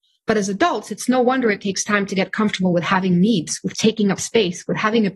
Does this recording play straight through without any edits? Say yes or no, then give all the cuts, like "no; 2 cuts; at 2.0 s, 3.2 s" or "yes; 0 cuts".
yes; 0 cuts